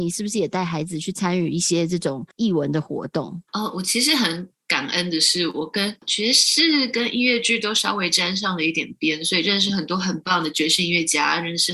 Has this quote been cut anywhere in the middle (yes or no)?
yes